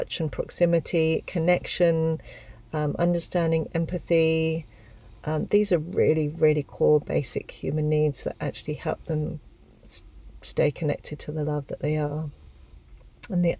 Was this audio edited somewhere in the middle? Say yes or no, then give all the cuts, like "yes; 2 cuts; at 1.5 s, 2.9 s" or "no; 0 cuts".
no; 0 cuts